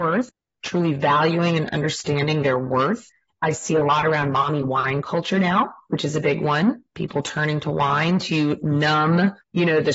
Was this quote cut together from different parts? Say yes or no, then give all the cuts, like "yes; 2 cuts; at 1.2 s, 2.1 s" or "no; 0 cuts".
no; 0 cuts